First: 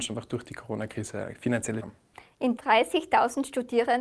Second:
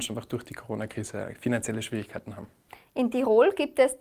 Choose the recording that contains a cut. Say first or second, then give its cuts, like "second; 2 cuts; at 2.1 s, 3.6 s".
first; 2 cuts; at 1.8 s, 2.6 s